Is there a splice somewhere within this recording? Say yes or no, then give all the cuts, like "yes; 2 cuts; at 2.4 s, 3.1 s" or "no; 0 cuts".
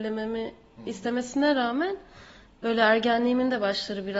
no; 0 cuts